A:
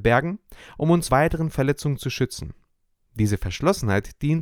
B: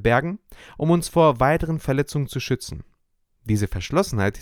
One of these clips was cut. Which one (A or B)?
A